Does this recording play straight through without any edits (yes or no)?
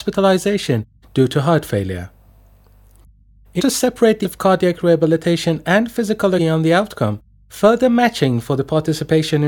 no